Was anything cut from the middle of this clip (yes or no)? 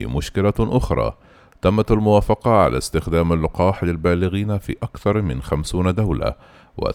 no